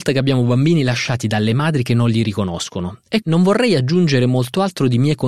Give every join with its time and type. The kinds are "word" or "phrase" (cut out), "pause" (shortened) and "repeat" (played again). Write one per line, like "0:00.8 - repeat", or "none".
0:03.2 - word